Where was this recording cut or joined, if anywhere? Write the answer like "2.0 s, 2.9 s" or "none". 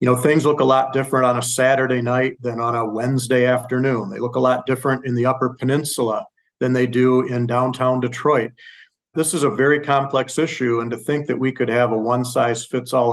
none

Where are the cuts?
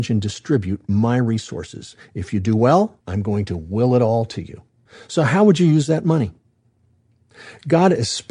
3.0 s, 4.9 s

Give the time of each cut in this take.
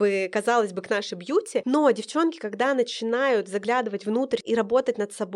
1.1 s, 4.4 s

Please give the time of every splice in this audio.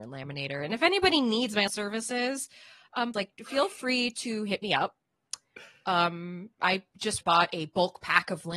1.7 s, 3.1 s, 6.5 s, 7.2 s

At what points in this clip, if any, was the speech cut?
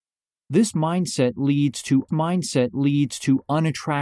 2.1 s

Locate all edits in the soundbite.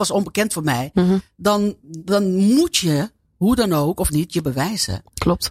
4.1 s

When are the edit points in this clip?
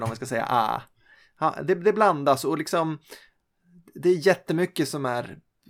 none

